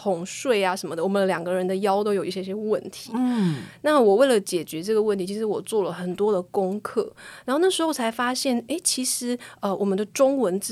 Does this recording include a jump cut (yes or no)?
no